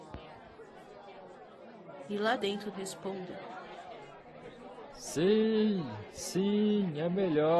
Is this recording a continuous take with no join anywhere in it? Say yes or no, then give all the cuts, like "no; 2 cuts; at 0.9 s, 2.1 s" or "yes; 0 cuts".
no; 2 cuts; at 2.4 s, 2.7 s